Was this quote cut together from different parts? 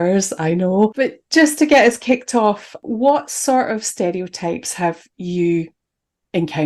no; 0 cuts

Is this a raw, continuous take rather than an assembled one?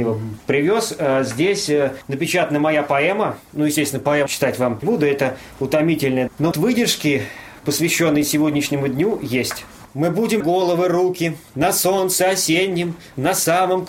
no; 6 cuts; at 4.3 s, 4.8 s, 6.5 s, 9.9 s, 10.4 s, 11.5 s

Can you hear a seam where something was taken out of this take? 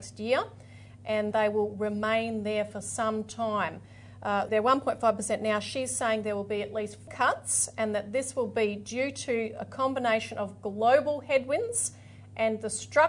yes; 3 cuts; at 1.3 s, 4.5 s, 7.1 s

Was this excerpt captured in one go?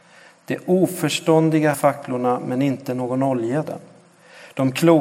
no; 2 cuts; at 1.7 s, 3.6 s

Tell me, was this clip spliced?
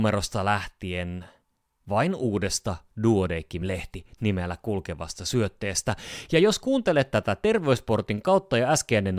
no; 0 cuts

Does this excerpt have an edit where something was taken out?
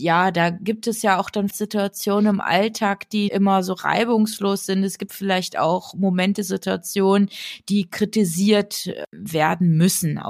yes; 2 cuts; at 1.5 s, 3.3 s

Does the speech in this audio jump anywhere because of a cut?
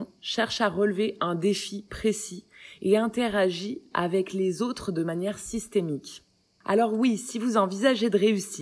no; 0 cuts

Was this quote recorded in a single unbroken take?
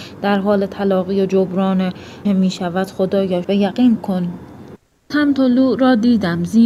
no; 4 cuts; at 2.2 s, 3.4 s, 4.0 s, 5.1 s

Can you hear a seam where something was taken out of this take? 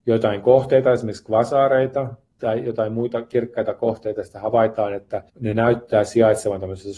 yes; 1 cut; at 5.3 s

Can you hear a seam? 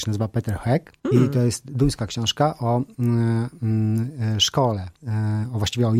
yes; 2 cuts; at 1.0 s, 5.0 s

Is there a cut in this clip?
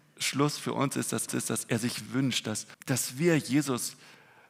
yes; 3 cuts; at 1.3 s, 2.1 s, 2.7 s

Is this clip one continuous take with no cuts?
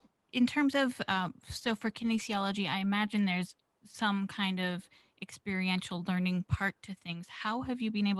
yes; 0 cuts

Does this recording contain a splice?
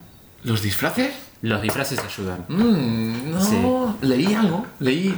no; 0 cuts

